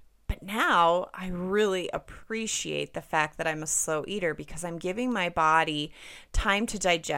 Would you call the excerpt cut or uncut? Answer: uncut